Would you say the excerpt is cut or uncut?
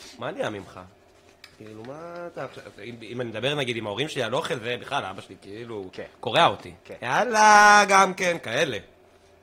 cut